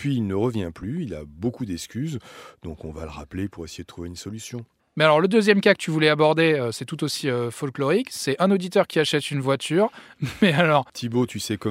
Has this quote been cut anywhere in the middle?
no; 0 cuts

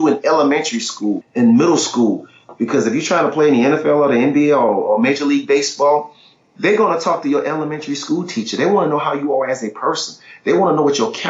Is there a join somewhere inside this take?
no; 0 cuts

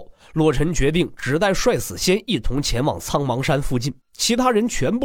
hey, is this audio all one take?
no; 1 cut; at 4.0 s

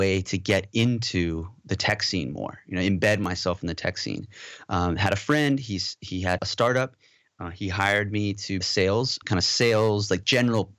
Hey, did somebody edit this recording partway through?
yes; 3 cuts; at 6.4 s, 8.6 s, 9.2 s

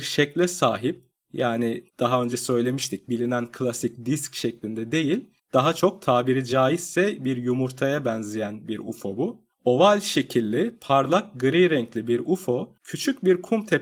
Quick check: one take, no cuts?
no; 4 cuts; at 1.9 s, 5.4 s, 9.5 s, 12.8 s

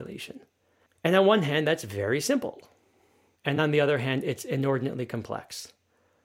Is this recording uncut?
yes; 0 cuts

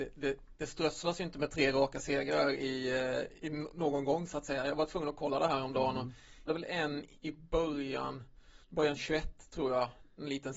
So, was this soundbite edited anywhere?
yes; 3 cuts; at 3.4 s, 6.5 s, 8.6 s

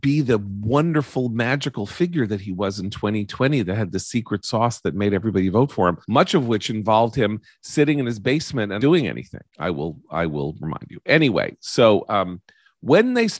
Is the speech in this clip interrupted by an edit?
yes; 3 cuts; at 6.0 s, 8.8 s, 9.5 s

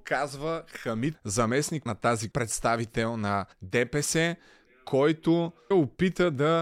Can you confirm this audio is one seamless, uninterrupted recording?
no; 5 cuts; at 1.1 s, 1.9 s, 2.3 s, 3.5 s, 5.7 s

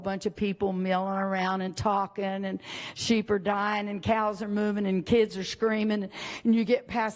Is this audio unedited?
yes; 0 cuts

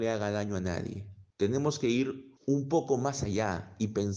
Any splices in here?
yes; 2 cuts; at 1.3 s, 2.4 s

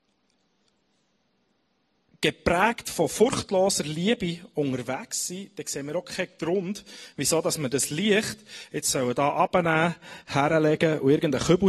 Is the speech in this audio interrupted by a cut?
no; 0 cuts

